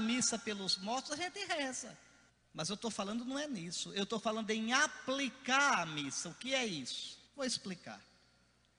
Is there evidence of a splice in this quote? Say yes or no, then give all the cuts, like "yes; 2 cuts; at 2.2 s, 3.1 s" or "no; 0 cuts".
yes; 2 cuts; at 2.3 s, 7.3 s